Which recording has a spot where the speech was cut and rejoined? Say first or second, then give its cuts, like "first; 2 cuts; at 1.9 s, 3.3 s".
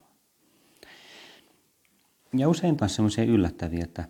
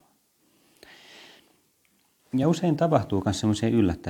first; 1 cut; at 2.8 s